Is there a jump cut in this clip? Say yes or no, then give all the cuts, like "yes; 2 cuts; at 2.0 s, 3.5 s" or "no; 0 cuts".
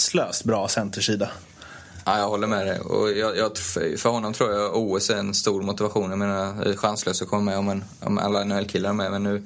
no; 0 cuts